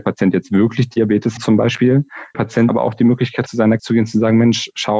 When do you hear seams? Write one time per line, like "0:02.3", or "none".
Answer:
0:01.4
0:02.3
0:02.7
0:03.5
0:03.8